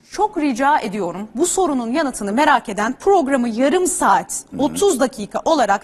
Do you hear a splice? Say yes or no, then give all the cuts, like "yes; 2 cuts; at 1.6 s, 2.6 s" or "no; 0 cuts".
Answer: no; 0 cuts